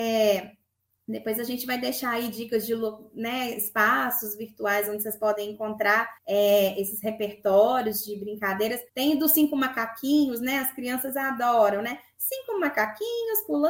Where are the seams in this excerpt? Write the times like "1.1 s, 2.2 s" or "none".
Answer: 6.2 s, 8.9 s